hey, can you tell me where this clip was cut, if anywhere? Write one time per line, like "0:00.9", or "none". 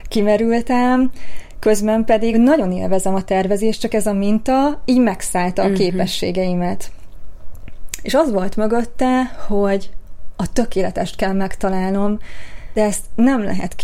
0:02.3
0:12.8